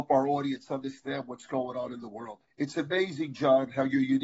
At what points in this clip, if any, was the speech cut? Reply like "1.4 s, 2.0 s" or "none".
2.5 s